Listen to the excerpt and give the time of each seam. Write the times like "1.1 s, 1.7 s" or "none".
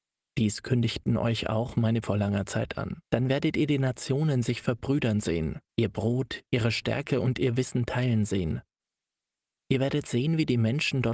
2.0 s, 3.0 s, 5.7 s, 6.5 s